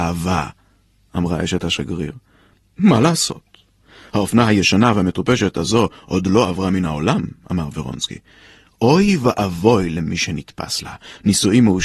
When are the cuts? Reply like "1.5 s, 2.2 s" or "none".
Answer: none